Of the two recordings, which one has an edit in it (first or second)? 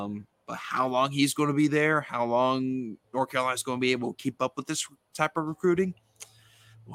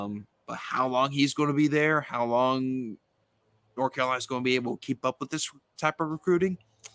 first